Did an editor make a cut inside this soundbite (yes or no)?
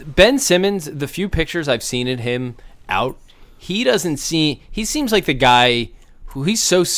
no